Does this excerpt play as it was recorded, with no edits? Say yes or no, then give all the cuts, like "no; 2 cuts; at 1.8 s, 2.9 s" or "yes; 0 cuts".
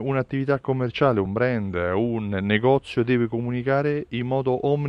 yes; 0 cuts